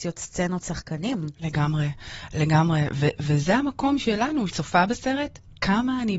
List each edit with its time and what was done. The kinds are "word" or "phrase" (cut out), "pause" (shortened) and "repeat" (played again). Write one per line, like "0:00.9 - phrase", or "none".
0:04.5 - phrase